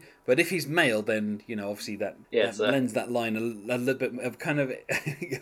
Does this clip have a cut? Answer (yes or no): yes